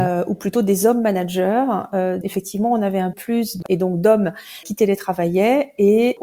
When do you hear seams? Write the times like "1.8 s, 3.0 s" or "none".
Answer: 2.2 s, 3.1 s, 3.6 s